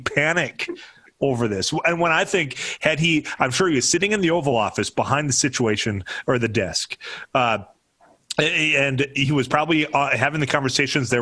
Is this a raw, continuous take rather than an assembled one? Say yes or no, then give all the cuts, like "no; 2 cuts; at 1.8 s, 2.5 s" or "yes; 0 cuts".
yes; 0 cuts